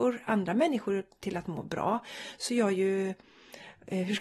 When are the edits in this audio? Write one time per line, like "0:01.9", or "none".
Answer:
0:02.5